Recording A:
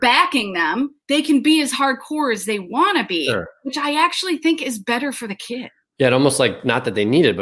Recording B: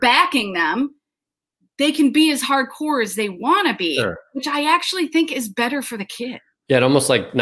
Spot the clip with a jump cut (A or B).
A